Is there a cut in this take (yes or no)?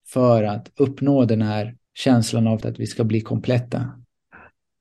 yes